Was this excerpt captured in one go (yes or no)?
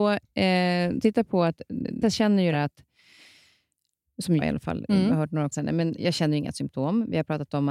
no